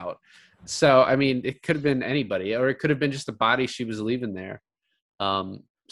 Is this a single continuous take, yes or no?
yes